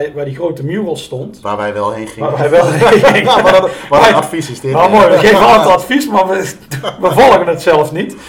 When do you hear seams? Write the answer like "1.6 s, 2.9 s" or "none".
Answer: none